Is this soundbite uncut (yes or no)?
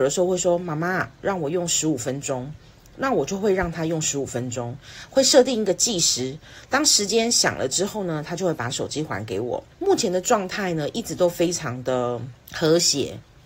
no